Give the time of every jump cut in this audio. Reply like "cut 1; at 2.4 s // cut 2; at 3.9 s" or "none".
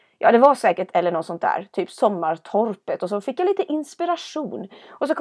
cut 1; at 0.9 s